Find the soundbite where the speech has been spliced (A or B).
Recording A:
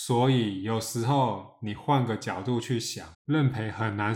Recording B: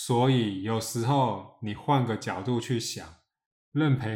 A